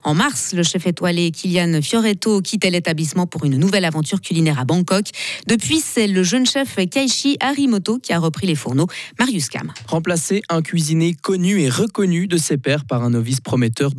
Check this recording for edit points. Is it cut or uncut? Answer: uncut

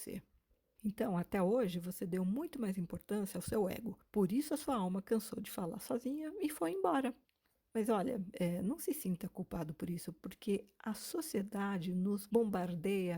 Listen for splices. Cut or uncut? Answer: uncut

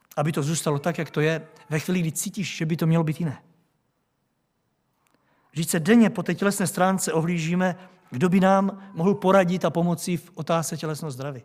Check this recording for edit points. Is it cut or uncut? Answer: uncut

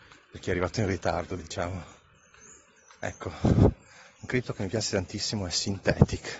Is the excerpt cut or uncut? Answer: uncut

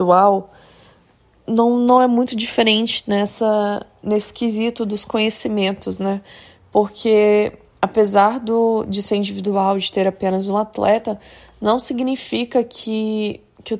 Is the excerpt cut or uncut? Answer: uncut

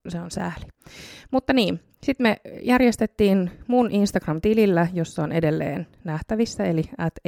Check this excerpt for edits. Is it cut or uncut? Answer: uncut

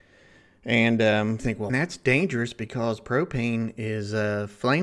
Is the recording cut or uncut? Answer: cut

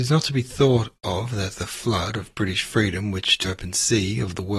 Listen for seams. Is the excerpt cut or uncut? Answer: cut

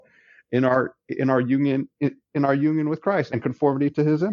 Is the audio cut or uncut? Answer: cut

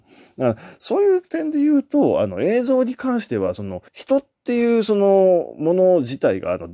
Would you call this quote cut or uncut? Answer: cut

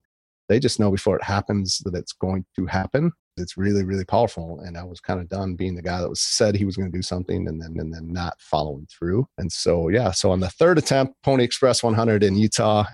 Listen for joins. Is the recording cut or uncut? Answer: cut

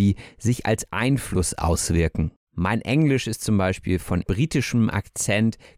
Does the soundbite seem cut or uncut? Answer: cut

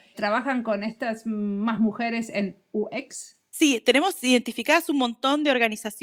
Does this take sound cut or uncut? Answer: uncut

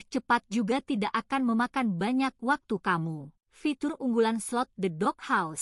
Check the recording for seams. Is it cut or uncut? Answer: cut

